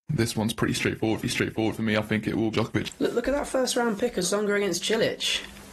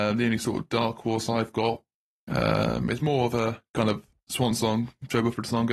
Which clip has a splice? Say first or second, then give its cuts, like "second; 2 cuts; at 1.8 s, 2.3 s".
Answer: first; 3 cuts; at 1.2 s, 2.5 s, 4.2 s